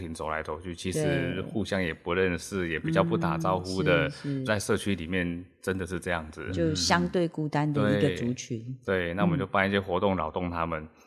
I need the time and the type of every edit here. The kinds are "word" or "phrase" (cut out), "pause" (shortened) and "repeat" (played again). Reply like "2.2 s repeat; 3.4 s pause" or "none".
4.5 s phrase